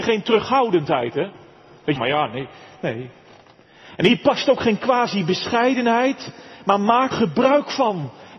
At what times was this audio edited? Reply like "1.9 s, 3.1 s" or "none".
2.0 s, 7.1 s